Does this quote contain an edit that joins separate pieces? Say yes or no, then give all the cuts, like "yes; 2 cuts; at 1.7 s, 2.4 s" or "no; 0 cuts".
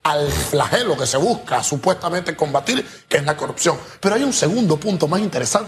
no; 0 cuts